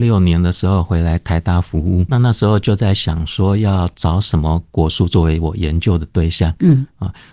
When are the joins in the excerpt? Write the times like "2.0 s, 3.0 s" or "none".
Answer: 2.1 s